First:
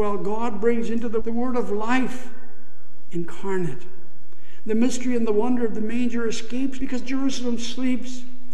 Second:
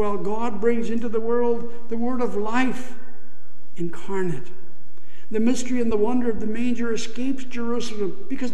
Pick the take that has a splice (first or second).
first